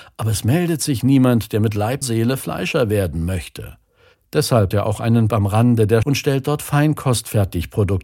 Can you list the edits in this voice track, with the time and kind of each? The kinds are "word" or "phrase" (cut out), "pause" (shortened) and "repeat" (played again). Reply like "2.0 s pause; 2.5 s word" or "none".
2.0 s word; 4.7 s word; 5.3 s word; 6.0 s word